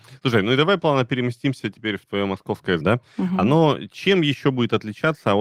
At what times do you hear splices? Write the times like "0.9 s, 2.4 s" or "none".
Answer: 2.8 s